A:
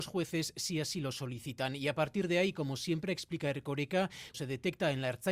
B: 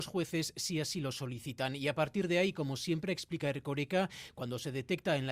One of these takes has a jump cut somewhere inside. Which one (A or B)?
A